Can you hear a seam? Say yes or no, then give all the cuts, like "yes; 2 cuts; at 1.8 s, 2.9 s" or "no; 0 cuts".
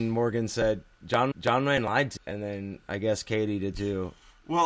yes; 3 cuts; at 1.3 s, 2.2 s, 3.7 s